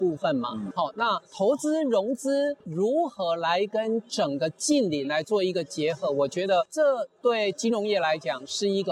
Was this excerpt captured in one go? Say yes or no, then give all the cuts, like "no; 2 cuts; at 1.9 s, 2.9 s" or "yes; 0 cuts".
no; 1 cut; at 1.2 s